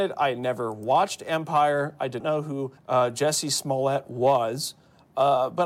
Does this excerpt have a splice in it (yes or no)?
yes